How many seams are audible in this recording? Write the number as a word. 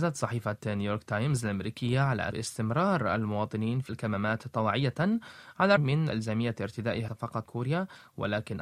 six